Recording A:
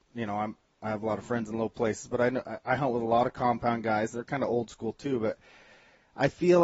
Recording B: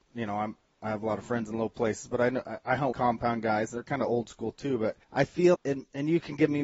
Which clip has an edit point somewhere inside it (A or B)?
B